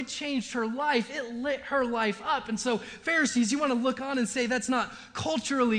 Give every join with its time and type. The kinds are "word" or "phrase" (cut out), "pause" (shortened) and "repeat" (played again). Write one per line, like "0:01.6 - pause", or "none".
none